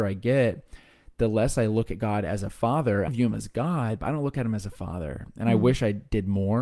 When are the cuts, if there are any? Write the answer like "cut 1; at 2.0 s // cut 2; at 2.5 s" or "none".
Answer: cut 1; at 3.1 s